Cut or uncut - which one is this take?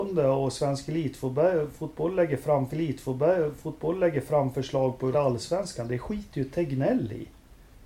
cut